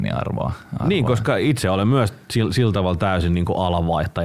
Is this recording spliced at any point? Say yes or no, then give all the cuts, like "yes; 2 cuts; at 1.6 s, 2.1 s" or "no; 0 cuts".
no; 0 cuts